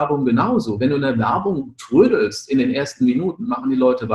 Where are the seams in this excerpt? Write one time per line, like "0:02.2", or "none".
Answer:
none